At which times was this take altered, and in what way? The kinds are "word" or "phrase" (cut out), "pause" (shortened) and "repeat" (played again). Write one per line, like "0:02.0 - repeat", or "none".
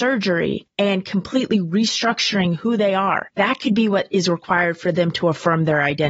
none

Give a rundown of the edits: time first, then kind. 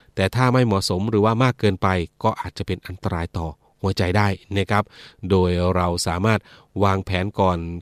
none

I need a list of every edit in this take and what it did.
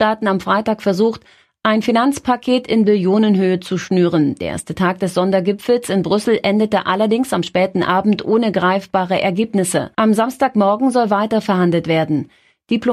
0:09.9 - pause

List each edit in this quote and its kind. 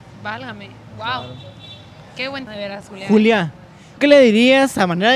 0:02.5 - word
0:04.0 - word

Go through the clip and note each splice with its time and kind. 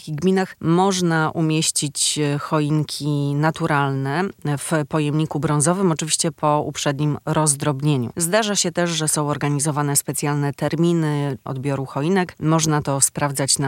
none

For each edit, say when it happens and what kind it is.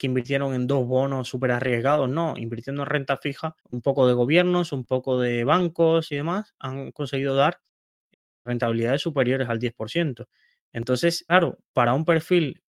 0:03.6 - pause

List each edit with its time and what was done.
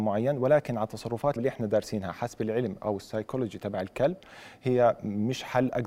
0:01.4 - word

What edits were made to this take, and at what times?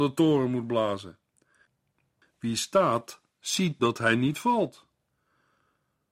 0:03.8 - word

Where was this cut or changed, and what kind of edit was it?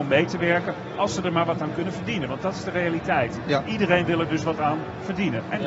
none

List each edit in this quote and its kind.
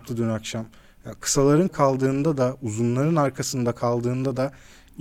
0:01.7 - word

